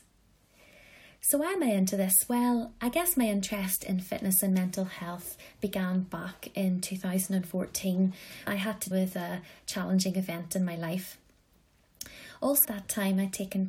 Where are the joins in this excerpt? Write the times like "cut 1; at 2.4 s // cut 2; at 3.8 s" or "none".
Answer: cut 1; at 8.5 s // cut 2; at 8.9 s // cut 3; at 12.6 s